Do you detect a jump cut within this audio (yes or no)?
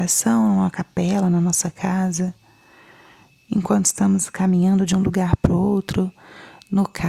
no